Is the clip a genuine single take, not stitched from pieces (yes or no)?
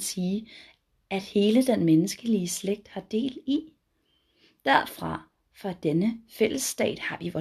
yes